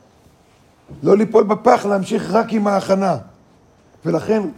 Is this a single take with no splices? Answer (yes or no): yes